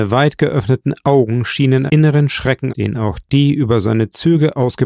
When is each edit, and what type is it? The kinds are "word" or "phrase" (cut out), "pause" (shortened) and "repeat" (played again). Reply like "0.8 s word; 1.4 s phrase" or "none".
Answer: 1.9 s word; 2.7 s word